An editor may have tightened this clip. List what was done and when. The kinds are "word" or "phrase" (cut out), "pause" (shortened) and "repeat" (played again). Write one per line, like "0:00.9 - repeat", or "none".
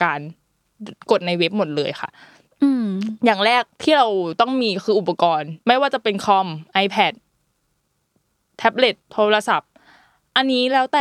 0:01.0 - pause
0:03.7 - pause
0:05.6 - pause
0:09.0 - pause